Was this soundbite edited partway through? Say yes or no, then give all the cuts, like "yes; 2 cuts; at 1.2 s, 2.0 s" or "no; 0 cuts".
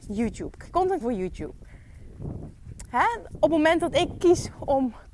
yes; 1 cut; at 1.0 s